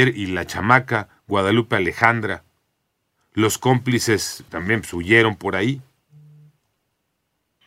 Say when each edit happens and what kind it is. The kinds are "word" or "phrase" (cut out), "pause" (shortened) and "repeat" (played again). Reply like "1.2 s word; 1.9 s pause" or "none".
4.5 s pause

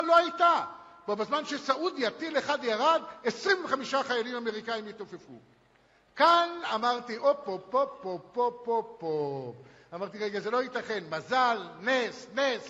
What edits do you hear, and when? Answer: none

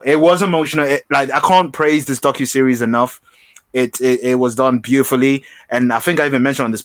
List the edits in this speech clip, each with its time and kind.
none

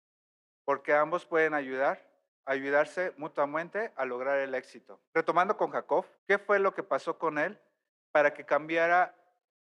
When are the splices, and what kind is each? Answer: 2.3 s pause; 5.0 s pause; 6.1 s pause

